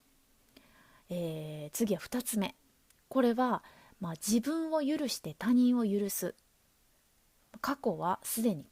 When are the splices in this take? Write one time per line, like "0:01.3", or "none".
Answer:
none